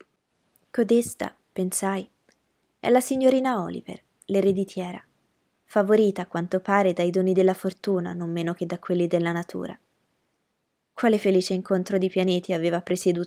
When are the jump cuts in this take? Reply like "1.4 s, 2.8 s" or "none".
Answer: none